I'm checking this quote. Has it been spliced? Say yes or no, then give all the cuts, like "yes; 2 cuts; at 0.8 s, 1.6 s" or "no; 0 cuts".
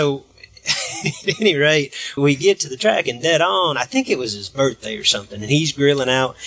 yes; 1 cut; at 2.2 s